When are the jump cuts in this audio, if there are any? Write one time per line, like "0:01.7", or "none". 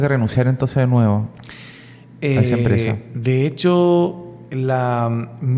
none